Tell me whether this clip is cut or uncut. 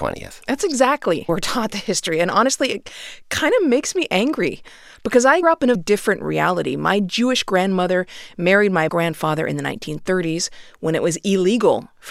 cut